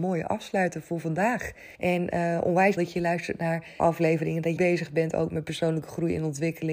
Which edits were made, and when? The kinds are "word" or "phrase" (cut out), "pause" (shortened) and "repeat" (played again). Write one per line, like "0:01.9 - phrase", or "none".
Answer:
0:01.7 - pause
0:02.8 - word
0:03.8 - word
0:04.6 - word